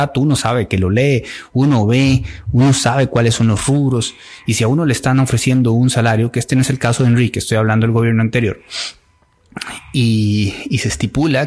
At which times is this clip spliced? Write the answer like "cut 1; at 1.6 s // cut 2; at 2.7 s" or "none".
none